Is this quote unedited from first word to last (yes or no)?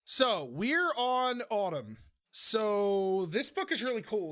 yes